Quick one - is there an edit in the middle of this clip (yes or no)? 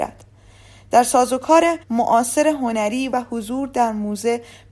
yes